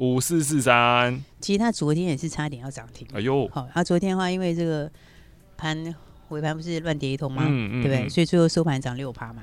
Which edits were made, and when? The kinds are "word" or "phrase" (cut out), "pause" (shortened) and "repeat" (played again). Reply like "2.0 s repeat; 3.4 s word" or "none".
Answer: none

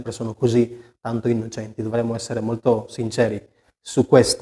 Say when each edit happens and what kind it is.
none

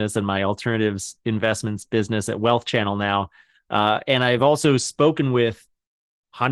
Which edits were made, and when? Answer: none

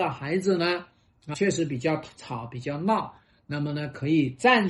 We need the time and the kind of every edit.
1.3 s word

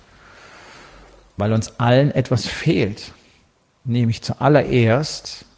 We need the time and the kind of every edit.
2.4 s word

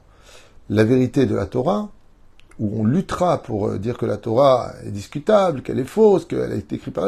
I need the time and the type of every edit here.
none

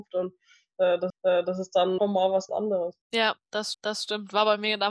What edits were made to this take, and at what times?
1.1 s repeat; 2.0 s word; 2.5 s word; 3.0 s pause; 3.7 s repeat

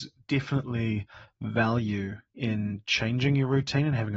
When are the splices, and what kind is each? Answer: 2.3 s pause

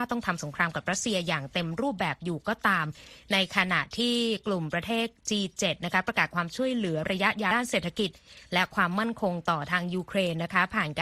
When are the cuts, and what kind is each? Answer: none

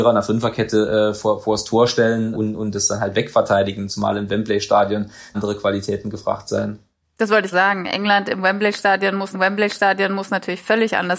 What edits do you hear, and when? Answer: 2.3 s word; 3.9 s word; 5.3 s phrase; 7.0 s pause; 7.5 s word; 9.3 s repeat

